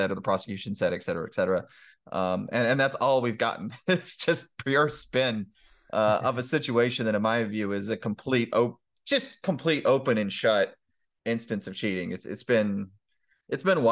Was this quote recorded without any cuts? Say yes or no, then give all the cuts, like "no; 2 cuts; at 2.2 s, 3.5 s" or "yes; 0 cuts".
yes; 0 cuts